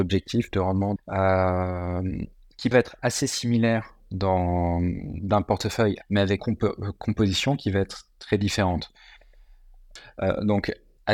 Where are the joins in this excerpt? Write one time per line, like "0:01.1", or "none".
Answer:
0:01.0
0:02.7
0:06.0
0:06.4